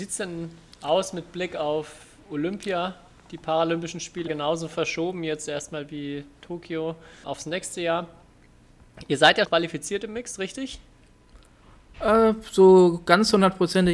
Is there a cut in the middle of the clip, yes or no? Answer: yes